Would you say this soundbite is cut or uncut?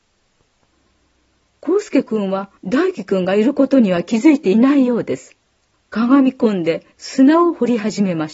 cut